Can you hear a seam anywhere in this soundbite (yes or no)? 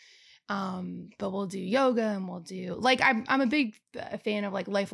no